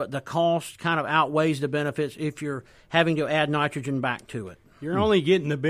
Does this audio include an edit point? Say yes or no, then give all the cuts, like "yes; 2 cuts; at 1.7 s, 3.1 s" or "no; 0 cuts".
no; 0 cuts